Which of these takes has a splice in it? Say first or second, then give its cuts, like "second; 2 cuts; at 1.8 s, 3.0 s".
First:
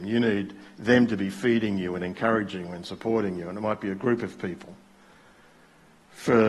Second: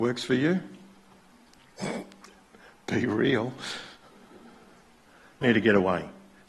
second; 1 cut; at 5.4 s